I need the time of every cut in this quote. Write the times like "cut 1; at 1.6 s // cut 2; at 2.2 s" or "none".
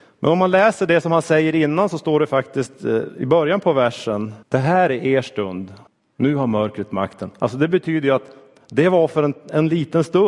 cut 1; at 4.4 s // cut 2; at 5.9 s